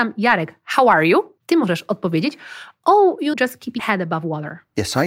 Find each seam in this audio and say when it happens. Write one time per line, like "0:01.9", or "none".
0:01.4
0:03.3
0:03.8